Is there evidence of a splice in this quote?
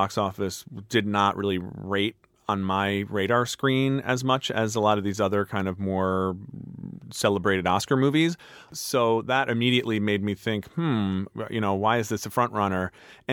no; 0 cuts

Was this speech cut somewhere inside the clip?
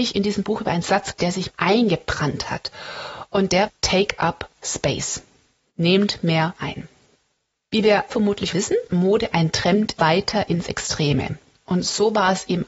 yes; 9 cuts; at 1.1 s, 1.5 s, 3.7 s, 4.6 s, 6.6 s, 8.1 s, 8.5 s, 8.9 s, 10.0 s

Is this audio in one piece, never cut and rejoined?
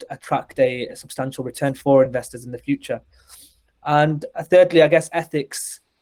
yes; 0 cuts

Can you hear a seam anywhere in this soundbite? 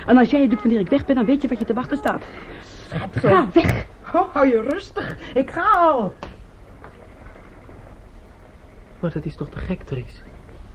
no; 0 cuts

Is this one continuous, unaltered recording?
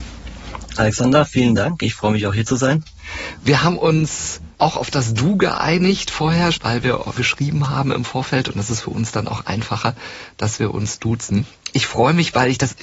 no; 3 cuts; at 4.5 s, 6.5 s, 7.2 s

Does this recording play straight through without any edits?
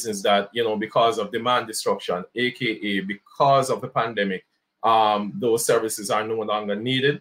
yes; 0 cuts

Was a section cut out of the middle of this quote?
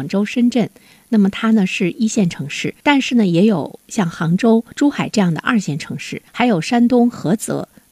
yes; 3 cuts; at 2.8 s, 4.7 s, 6.3 s

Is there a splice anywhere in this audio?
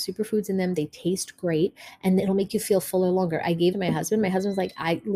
yes; 2 cuts; at 2.2 s, 3.7 s

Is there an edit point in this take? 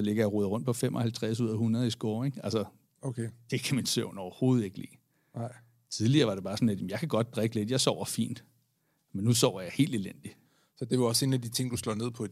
no; 0 cuts

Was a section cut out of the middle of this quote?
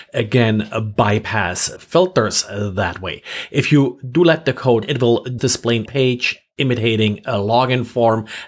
yes; 4 cuts; at 1.8 s, 4.8 s, 5.4 s, 5.9 s

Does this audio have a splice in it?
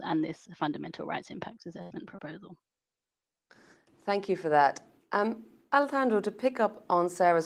no; 0 cuts

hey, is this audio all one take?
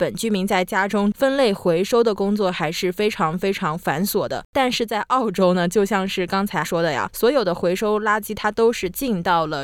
no; 1 cut; at 6.6 s

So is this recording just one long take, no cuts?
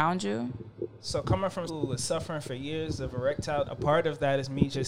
no; 2 cuts; at 1.7 s, 3.6 s

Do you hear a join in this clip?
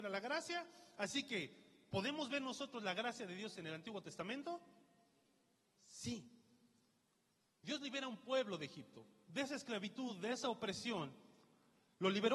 no; 0 cuts

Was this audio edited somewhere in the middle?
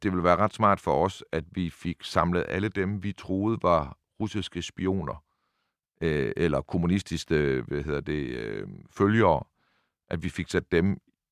no; 0 cuts

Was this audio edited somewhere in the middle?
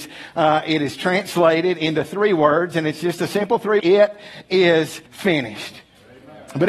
yes; 2 cuts; at 3.8 s, 5.1 s

